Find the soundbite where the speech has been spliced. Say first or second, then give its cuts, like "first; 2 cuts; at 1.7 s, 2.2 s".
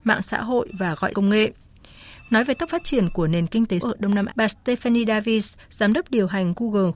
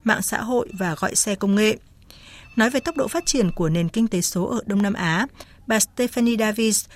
first; 4 cuts; at 1.1 s, 2.7 s, 3.8 s, 4.3 s